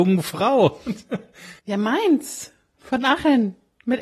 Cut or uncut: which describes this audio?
cut